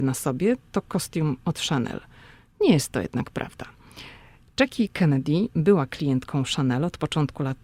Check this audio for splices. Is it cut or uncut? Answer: uncut